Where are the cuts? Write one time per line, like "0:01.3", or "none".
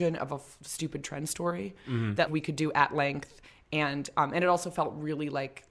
0:02.3